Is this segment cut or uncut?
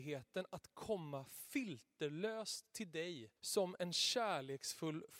cut